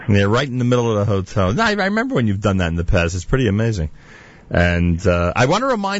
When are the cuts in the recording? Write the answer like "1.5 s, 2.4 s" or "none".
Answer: none